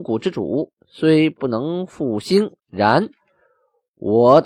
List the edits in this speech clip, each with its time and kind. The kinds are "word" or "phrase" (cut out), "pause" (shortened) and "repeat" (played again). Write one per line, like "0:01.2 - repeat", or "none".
0:02.6 - pause